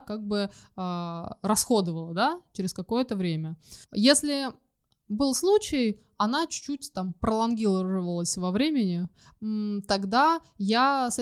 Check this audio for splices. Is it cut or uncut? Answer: cut